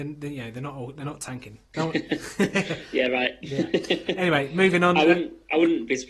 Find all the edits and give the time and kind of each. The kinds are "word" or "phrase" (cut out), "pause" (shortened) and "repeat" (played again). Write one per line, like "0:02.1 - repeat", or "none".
0:01.7 - pause

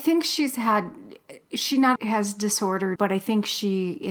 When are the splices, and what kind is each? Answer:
0:01.4 - pause
0:02.0 - word
0:03.0 - word

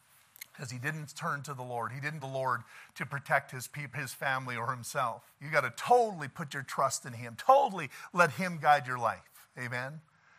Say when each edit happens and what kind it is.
0:02.2 - word
0:03.9 - word
0:05.3 - pause

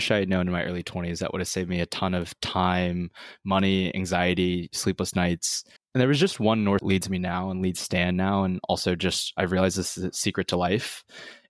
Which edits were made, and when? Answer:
0:05.8 - pause
0:06.8 - phrase

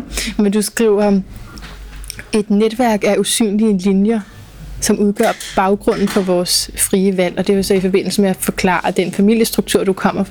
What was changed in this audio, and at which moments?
none

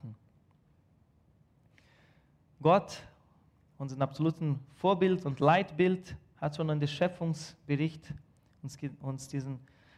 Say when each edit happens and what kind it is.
none

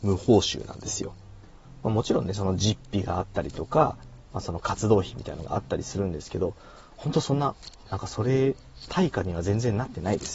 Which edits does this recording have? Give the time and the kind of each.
none

